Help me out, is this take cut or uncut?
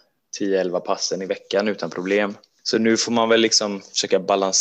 uncut